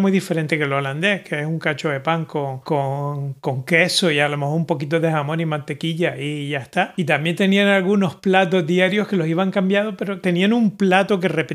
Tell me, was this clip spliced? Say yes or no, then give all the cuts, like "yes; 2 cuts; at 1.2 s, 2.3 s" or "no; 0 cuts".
no; 0 cuts